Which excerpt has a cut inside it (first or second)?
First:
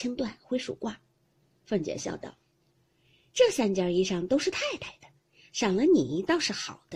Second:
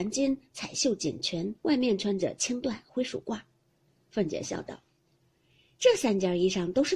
second